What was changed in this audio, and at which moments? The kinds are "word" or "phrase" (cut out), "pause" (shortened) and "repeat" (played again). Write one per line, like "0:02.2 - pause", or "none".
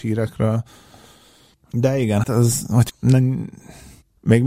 0:02.2 - word
0:02.9 - word